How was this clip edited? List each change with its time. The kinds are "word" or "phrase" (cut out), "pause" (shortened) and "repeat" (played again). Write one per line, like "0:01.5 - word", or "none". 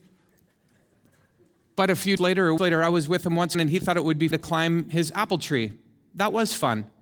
0:02.2 - word
0:02.6 - word
0:03.5 - word
0:04.3 - word

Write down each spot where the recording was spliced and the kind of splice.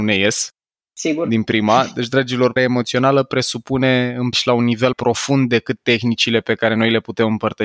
0:02.6 - phrase
0:04.3 - word
0:04.9 - word

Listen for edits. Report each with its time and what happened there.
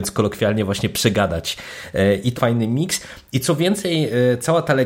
0:02.4 - phrase

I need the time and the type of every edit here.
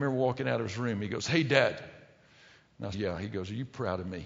0:02.9 - word

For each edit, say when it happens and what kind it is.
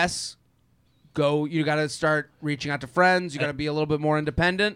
none

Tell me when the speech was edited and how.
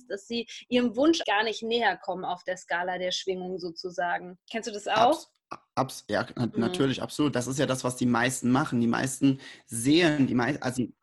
0:01.2 - word
0:04.4 - pause

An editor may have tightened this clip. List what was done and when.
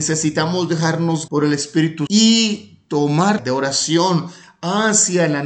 0:01.3 - word
0:02.1 - word
0:03.4 - phrase

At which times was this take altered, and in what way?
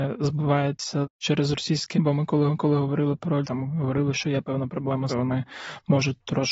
0:01.9 - word
0:02.5 - repeat
0:03.4 - word
0:05.1 - phrase

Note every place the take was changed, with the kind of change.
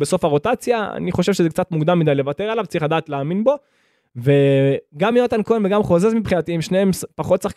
none

